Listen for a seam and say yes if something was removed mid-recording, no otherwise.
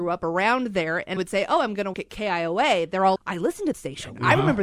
yes